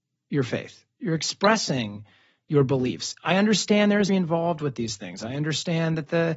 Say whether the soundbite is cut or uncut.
cut